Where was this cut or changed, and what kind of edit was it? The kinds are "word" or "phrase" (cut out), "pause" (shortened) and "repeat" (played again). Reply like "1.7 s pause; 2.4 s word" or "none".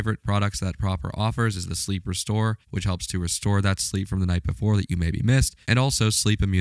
2.6 s pause; 5.6 s pause